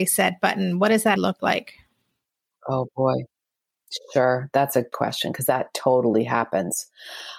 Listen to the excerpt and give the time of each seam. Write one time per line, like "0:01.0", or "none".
0:01.2
0:04.9